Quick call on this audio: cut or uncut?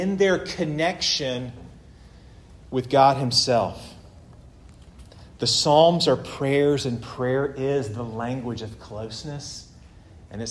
uncut